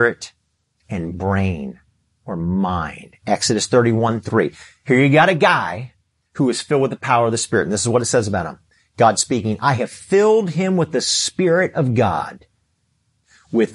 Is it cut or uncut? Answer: uncut